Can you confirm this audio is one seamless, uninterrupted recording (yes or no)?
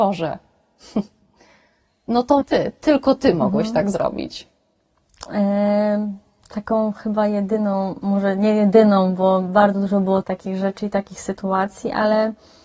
no